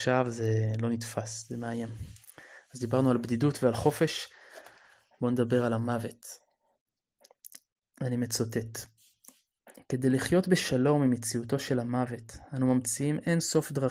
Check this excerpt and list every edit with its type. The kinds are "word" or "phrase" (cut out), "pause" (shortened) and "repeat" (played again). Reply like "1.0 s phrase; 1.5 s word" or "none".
none